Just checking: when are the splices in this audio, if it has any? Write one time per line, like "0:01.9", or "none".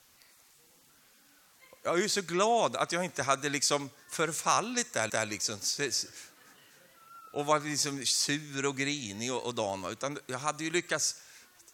0:05.1